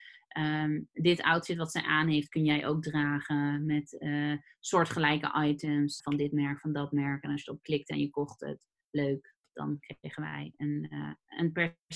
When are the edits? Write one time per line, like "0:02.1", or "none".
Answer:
0:06.0